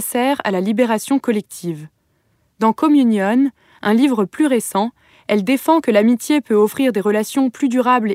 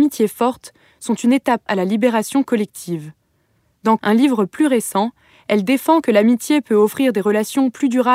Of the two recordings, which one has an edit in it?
second; 2 cuts; at 1.7 s, 4.0 s

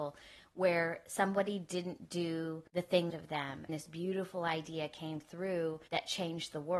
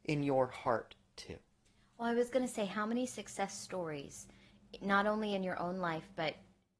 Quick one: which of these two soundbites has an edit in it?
first; 4 cuts; at 2.7 s, 3.1 s, 3.7 s, 5.9 s

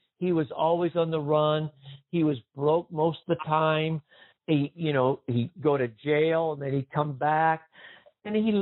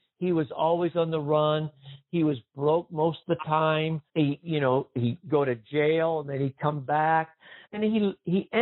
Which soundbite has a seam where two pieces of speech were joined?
second; 2 cuts; at 4.1 s, 7.6 s

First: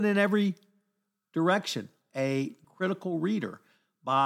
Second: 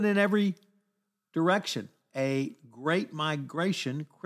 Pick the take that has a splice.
first; 1 cut; at 2.6 s

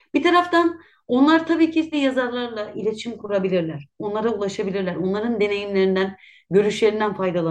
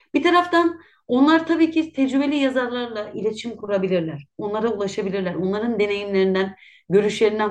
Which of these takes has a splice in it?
first; 1 cut; at 1.9 s

